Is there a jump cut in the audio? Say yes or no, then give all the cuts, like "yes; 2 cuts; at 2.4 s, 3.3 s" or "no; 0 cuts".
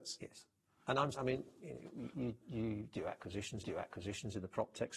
yes; 3 cuts; at 1.1 s, 2.1 s, 3.6 s